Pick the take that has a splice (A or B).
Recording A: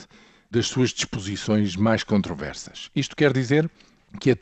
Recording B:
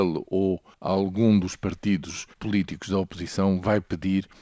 B